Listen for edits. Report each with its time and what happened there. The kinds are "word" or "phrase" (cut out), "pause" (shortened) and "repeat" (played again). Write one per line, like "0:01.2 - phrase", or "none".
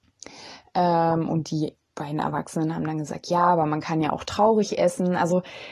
none